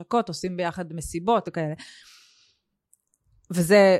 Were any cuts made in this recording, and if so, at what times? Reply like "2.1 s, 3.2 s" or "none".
1.4 s